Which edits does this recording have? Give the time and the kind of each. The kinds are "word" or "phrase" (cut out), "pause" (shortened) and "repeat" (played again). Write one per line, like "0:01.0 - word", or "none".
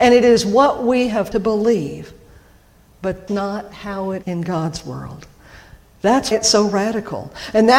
0:01.3 - word
0:03.3 - word
0:04.2 - word
0:06.3 - word